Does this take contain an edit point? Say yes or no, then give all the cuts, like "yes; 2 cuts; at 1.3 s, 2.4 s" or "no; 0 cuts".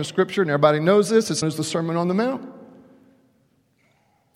yes; 1 cut; at 1.4 s